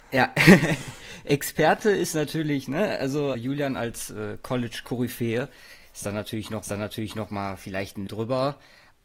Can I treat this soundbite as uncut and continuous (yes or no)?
no